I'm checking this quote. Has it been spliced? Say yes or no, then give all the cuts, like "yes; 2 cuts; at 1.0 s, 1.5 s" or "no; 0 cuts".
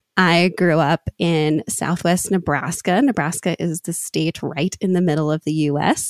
no; 0 cuts